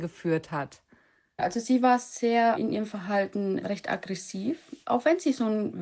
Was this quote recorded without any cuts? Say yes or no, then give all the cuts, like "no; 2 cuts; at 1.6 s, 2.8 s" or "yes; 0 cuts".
yes; 0 cuts